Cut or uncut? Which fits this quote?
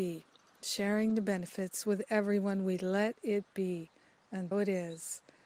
cut